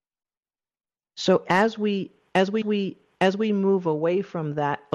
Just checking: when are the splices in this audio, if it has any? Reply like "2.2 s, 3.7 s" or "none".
2.6 s